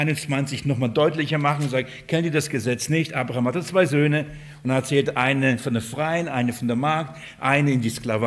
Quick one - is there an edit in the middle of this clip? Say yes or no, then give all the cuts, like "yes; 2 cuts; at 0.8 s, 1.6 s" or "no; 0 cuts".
no; 0 cuts